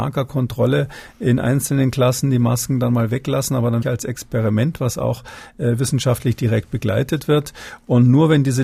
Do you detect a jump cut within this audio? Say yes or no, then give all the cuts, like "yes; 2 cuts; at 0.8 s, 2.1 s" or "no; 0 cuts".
yes; 1 cut; at 3.8 s